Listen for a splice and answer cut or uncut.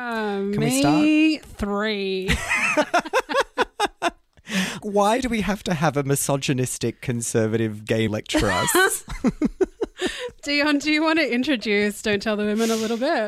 cut